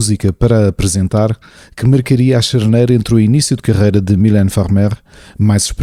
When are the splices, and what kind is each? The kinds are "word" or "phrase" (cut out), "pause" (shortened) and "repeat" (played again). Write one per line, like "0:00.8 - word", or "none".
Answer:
none